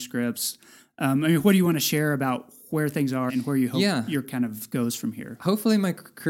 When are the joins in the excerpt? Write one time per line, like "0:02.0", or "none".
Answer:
0:03.3
0:04.2